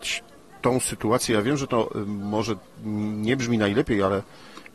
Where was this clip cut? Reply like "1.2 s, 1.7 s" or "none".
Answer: none